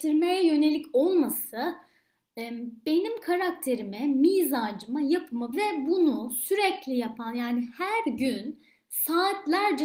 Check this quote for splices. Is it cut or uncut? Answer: cut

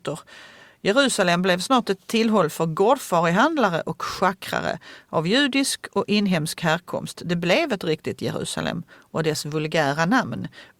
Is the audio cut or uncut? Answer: uncut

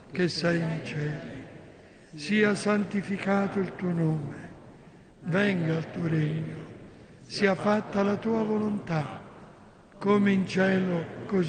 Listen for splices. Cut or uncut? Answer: uncut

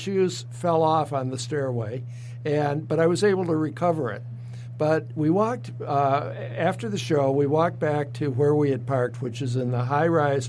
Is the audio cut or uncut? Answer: uncut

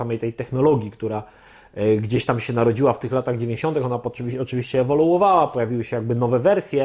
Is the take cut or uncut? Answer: uncut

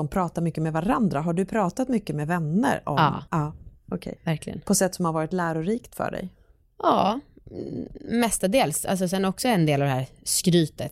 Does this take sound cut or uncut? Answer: cut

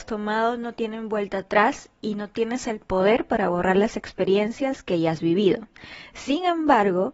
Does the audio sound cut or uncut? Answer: uncut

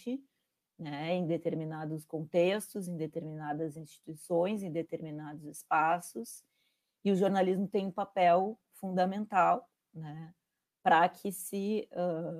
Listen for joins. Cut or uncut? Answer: uncut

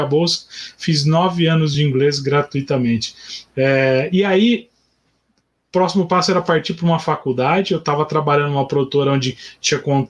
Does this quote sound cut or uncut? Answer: uncut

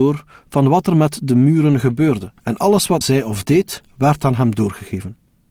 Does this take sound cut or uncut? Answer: cut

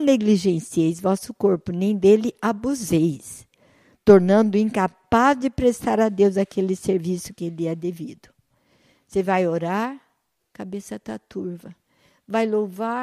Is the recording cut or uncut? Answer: uncut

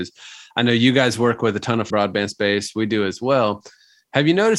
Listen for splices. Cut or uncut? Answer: cut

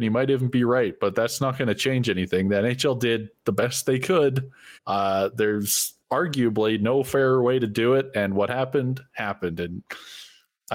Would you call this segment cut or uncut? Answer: cut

